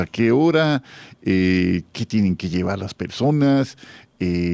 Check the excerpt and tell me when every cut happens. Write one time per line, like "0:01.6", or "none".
none